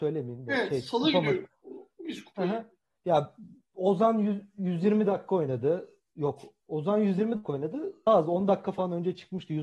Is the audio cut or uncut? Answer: cut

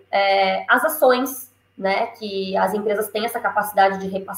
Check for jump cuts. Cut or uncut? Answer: uncut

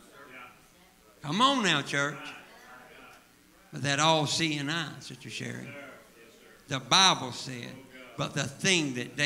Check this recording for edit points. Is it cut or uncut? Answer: uncut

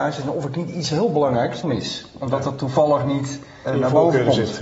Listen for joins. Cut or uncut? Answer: cut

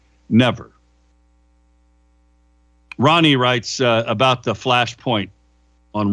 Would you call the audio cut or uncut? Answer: uncut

